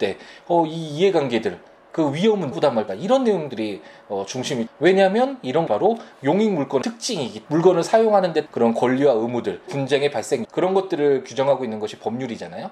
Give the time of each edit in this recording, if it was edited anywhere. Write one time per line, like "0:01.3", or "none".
0:02.5
0:02.9
0:04.7
0:05.7
0:06.8
0:07.5
0:08.5
0:09.7
0:10.4